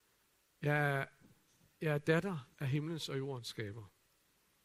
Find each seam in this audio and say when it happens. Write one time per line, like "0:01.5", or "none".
0:02.5